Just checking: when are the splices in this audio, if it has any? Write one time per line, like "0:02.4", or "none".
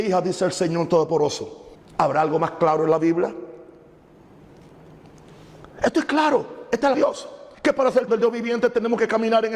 0:01.7
0:06.9
0:07.5
0:08.1